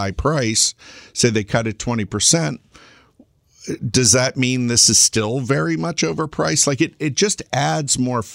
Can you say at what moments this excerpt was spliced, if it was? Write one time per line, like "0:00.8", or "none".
none